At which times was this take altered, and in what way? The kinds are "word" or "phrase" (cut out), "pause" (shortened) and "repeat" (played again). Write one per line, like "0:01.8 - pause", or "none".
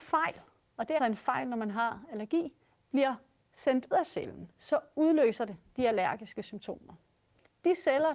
0:01.0 - word
0:03.9 - word